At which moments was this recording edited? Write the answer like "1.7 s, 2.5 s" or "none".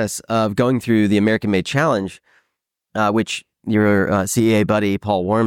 none